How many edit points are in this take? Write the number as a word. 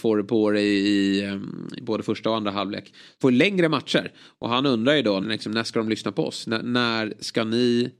four